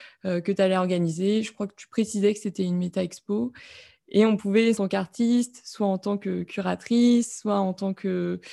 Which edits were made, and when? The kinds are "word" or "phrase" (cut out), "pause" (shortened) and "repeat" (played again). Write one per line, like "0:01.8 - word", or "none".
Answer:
0:04.8 - phrase